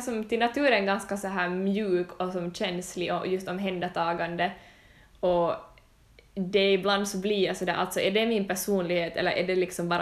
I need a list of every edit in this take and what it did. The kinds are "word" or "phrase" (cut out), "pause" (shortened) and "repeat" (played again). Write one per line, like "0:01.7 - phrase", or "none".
none

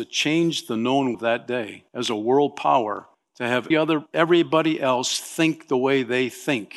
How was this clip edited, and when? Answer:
0:01.1 - word
0:01.9 - pause
0:03.1 - pause
0:03.7 - word
0:04.1 - pause

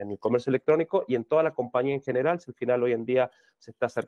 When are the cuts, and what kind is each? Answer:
none

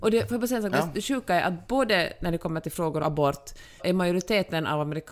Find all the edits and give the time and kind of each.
0:03.0 - phrase
0:03.8 - word

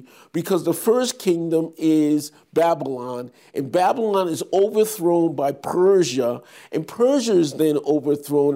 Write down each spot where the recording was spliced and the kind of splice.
none

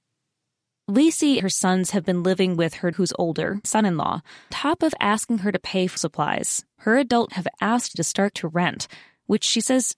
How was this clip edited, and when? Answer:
0:01.4 - word
0:02.9 - word
0:03.6 - word
0:04.5 - word
0:06.0 - word
0:07.3 - word
0:07.9 - word
0:08.3 - word

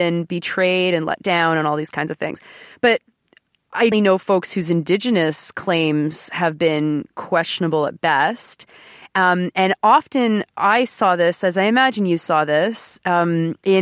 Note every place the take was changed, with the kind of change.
0:03.9 - word

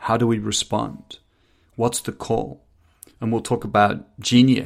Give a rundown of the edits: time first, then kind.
none

